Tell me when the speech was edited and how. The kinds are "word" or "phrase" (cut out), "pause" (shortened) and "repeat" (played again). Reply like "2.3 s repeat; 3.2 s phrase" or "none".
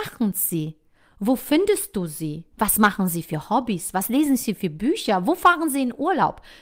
2.5 s pause